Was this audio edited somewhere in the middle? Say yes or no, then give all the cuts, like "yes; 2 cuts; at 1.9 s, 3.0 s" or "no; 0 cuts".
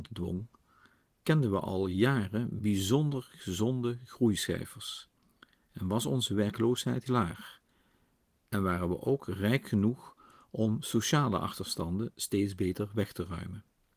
yes; 1 cut; at 7.1 s